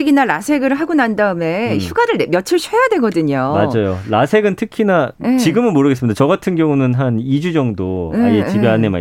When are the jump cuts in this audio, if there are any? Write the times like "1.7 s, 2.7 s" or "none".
none